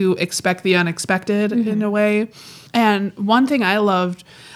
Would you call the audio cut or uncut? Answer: cut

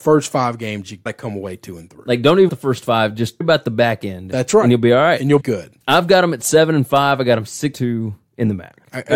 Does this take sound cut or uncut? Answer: cut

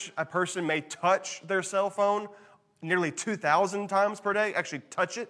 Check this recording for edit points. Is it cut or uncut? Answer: uncut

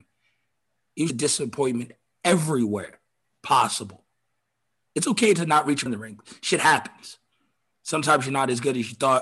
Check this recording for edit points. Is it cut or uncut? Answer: cut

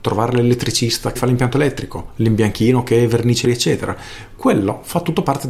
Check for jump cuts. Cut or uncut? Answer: cut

